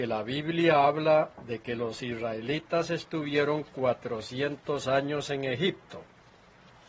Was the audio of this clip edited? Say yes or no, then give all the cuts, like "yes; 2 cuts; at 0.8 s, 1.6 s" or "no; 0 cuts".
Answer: no; 0 cuts